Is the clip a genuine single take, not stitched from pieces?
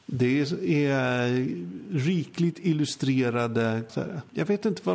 no; 1 cut; at 3.9 s

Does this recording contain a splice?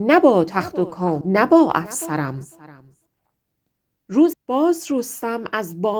yes; 2 cuts; at 1.2 s, 4.3 s

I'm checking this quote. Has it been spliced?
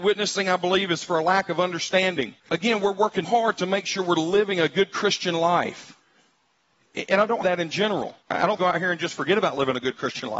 yes; 5 cuts; at 2.4 s, 3.2 s, 7.4 s, 8.2 s, 8.6 s

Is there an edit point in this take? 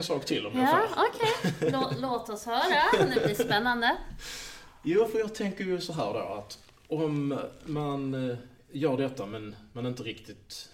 no; 0 cuts

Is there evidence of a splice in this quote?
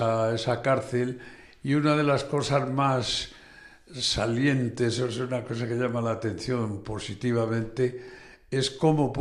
no; 0 cuts

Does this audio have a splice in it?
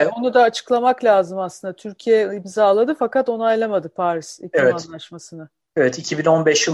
no; 0 cuts

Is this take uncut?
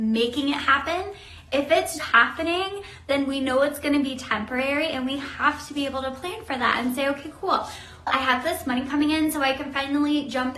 no; 2 cuts; at 2.0 s, 8.1 s

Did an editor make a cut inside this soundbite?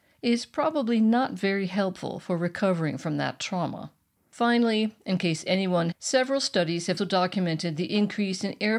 yes; 3 cuts; at 4.2 s, 5.9 s, 7.0 s

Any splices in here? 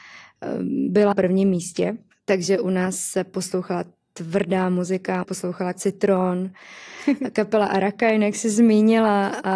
yes; 4 cuts; at 1.1 s, 2.1 s, 5.2 s, 5.7 s

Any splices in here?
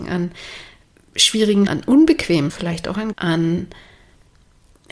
yes; 3 cuts; at 1.7 s, 2.5 s, 3.1 s

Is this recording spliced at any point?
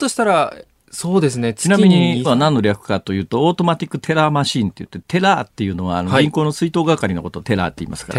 yes; 1 cut; at 2.2 s

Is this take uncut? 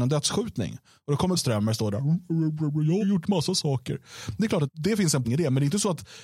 no; 4 cuts; at 1.4 s, 3.0 s, 4.7 s, 5.2 s

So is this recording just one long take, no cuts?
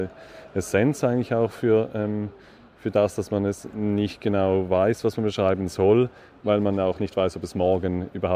yes; 0 cuts

